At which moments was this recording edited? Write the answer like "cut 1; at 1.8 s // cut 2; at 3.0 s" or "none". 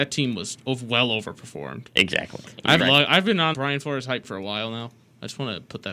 cut 1; at 2.8 s // cut 2; at 3.5 s // cut 3; at 4.2 s